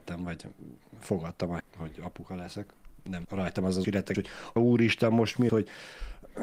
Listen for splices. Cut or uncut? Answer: cut